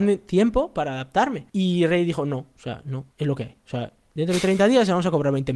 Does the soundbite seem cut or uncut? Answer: cut